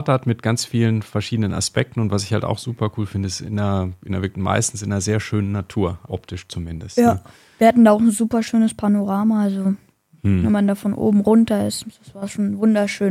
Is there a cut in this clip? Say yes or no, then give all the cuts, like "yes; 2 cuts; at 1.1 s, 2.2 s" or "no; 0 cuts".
yes; 1 cut; at 6.1 s